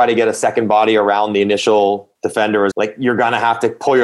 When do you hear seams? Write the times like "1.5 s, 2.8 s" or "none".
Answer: 2.1 s, 2.7 s